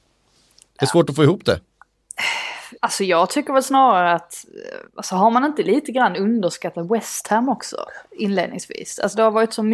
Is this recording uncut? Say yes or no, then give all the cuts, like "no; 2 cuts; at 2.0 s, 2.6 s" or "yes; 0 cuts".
no; 2 cuts; at 2.8 s, 4.9 s